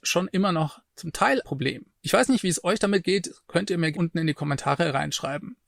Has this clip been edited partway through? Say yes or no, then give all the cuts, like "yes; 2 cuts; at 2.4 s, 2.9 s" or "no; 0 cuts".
yes; 2 cuts; at 1.4 s, 3.9 s